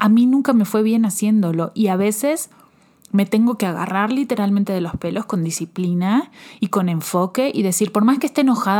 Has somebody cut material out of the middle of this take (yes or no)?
no